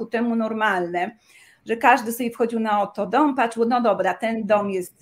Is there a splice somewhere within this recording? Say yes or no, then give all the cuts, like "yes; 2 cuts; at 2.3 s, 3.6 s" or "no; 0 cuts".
no; 0 cuts